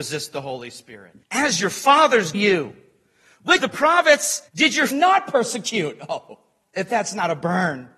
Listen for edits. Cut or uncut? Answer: cut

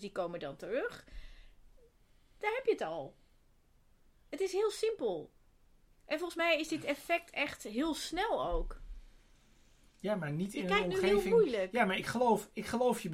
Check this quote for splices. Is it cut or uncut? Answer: uncut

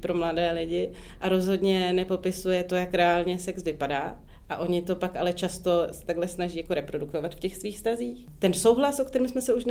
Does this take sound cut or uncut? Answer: uncut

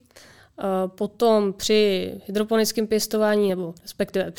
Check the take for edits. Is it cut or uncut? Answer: uncut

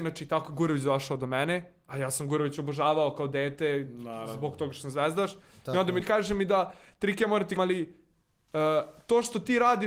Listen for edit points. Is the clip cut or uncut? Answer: cut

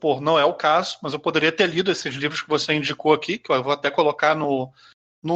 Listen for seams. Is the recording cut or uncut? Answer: uncut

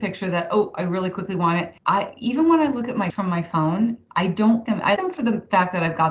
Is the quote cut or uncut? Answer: cut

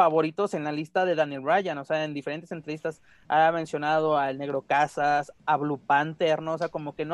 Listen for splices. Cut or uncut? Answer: uncut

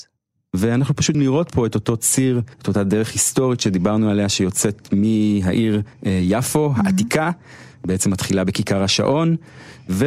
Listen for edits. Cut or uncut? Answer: cut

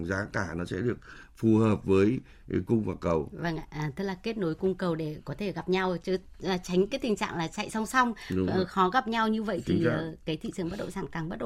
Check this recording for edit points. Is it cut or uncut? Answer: uncut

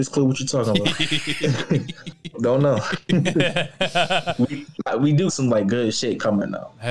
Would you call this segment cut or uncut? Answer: cut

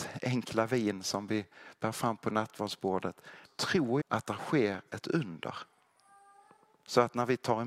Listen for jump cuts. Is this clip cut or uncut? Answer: cut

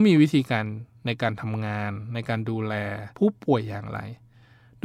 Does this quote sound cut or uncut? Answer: cut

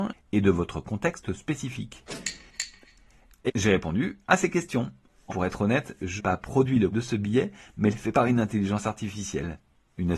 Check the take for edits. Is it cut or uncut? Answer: cut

